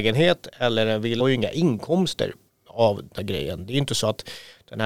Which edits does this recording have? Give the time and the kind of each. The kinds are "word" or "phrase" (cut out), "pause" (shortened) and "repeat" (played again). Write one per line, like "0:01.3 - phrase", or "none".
0:01.2 - word
0:02.5 - pause
0:03.2 - word